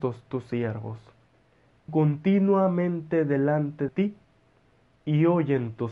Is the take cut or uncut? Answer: cut